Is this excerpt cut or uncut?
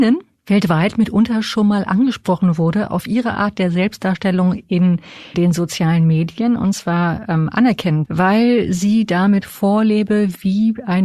cut